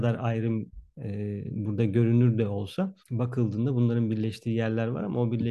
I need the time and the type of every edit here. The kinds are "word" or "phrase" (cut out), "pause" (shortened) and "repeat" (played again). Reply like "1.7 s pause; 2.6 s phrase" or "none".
3.0 s pause